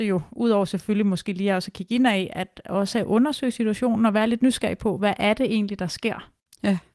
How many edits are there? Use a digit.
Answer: 0